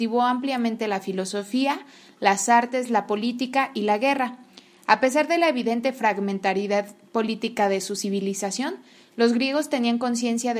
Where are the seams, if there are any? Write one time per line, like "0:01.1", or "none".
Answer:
none